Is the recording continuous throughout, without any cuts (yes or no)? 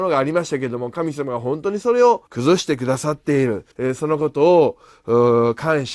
no